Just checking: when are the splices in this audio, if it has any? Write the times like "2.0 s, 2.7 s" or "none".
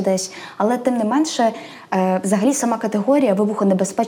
none